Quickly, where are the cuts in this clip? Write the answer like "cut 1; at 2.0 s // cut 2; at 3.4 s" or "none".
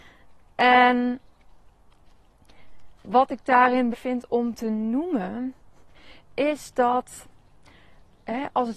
cut 1; at 3.0 s // cut 2; at 3.9 s